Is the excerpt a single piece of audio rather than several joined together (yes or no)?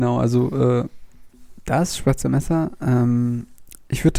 yes